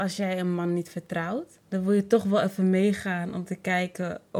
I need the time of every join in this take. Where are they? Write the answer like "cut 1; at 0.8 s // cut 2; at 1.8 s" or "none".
cut 1; at 1.6 s